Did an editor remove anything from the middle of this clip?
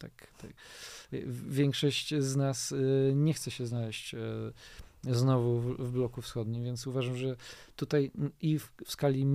no; 0 cuts

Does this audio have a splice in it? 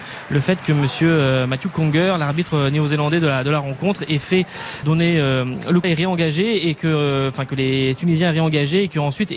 yes; 2 cuts; at 4.8 s, 5.8 s

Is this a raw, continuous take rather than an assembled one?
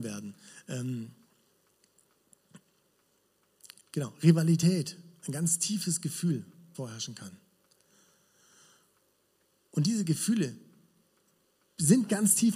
no; 1 cut; at 6.7 s

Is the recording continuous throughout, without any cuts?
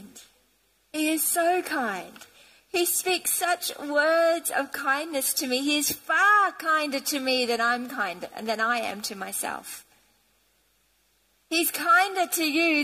yes; 0 cuts

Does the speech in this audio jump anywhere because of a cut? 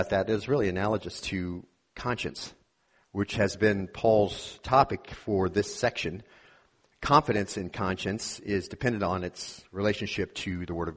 no; 0 cuts

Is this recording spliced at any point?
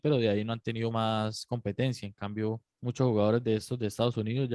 yes; 2 cuts; at 0.9 s, 2.7 s

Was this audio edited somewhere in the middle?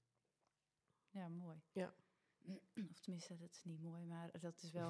no; 0 cuts

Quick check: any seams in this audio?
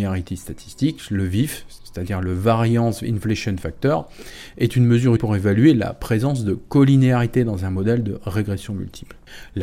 yes; 1 cut; at 5.2 s

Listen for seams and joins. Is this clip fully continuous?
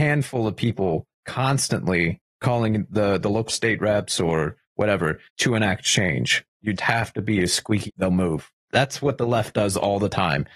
no; 4 cuts; at 3.5 s, 5.3 s, 6.8 s, 7.9 s

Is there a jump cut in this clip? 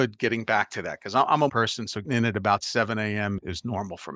yes; 2 cuts; at 1.5 s, 2.0 s

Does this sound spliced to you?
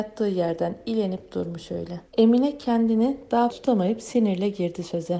yes; 2 cuts; at 2.1 s, 3.5 s

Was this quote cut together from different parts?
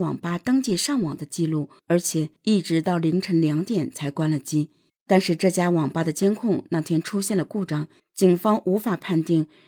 yes; 4 cuts; at 1.8 s, 2.4 s, 4.9 s, 8.0 s

